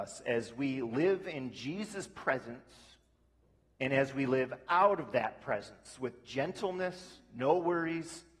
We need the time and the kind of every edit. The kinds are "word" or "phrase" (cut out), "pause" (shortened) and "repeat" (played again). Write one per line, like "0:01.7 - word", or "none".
none